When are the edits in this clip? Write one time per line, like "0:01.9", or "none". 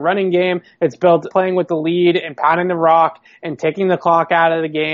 0:01.3